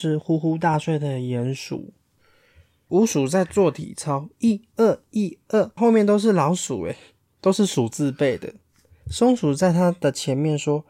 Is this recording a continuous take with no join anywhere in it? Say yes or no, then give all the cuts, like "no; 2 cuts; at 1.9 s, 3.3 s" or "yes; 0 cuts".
no; 1 cut; at 5.8 s